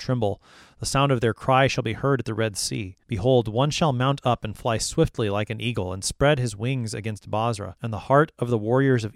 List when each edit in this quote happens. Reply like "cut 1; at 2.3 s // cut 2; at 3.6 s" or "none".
cut 1; at 3.0 s // cut 2; at 7.8 s